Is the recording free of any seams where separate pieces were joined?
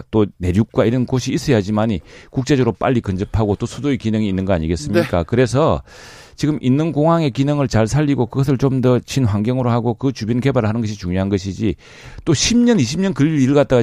yes; 0 cuts

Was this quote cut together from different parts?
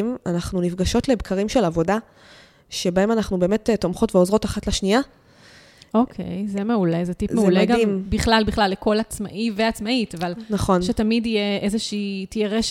no; 0 cuts

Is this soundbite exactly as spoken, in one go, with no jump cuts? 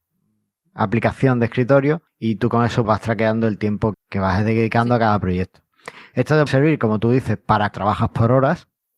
no; 5 cuts; at 2.1 s, 2.8 s, 3.9 s, 6.5 s, 7.7 s

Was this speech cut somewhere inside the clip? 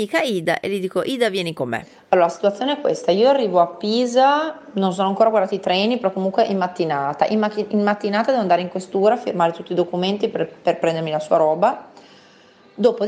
no; 0 cuts

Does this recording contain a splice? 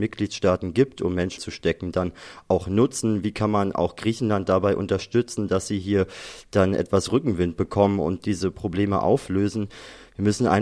yes; 1 cut; at 1.4 s

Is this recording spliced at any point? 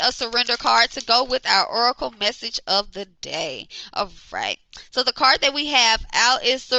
no; 0 cuts

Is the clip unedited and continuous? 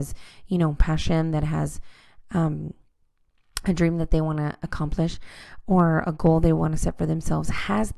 yes; 0 cuts

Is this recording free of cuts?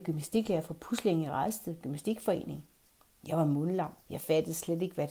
no; 1 cut; at 4.0 s

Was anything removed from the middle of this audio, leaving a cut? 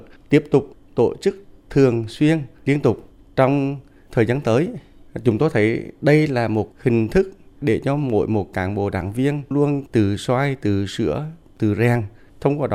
yes; 1 cut; at 9.5 s

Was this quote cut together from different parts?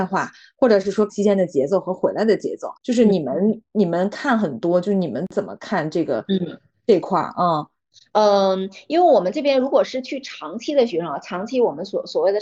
yes; 3 cuts; at 1.1 s, 2.8 s, 3.7 s

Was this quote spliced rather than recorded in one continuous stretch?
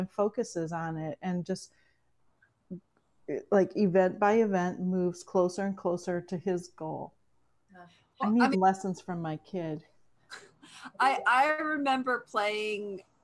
yes; 1 cut; at 8.5 s

